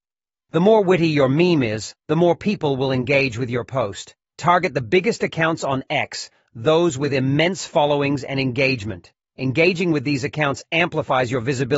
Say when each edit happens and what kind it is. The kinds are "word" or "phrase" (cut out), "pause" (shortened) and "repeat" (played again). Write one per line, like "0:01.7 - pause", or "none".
none

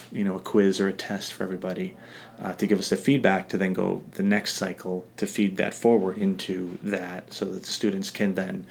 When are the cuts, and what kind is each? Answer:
0:05.1 - pause

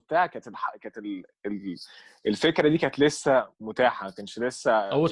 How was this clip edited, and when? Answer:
none

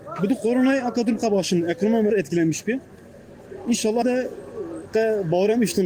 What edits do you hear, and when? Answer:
0:02.1 - word
0:04.0 - word

